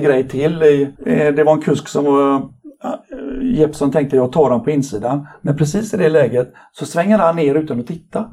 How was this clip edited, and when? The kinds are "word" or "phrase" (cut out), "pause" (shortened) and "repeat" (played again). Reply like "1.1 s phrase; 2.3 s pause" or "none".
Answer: 1.0 s pause

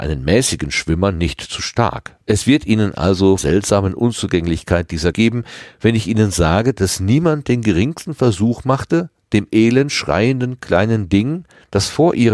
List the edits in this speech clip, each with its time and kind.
2.2 s pause; 3.4 s phrase; 5.1 s phrase

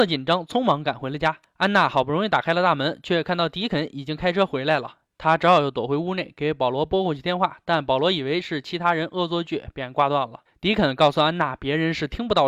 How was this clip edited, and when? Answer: none

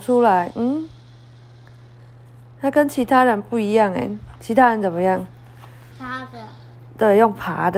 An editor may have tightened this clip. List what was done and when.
none

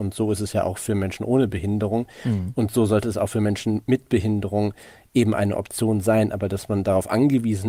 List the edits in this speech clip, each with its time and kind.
none

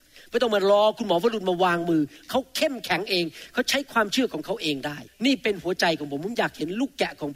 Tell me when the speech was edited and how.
5.1 s pause

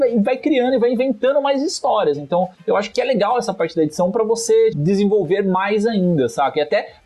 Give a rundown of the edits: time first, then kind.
2.5 s pause; 2.9 s word; 4.7 s word

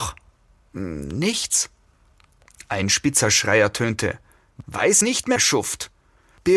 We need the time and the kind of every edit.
5.0 s phrase; 5.4 s phrase

